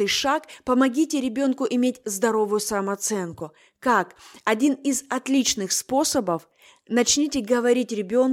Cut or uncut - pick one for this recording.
uncut